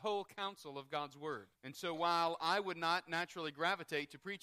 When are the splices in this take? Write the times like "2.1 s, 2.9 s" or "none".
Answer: 1.6 s